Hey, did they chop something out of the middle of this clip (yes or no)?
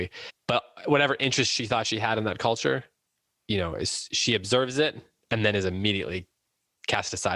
no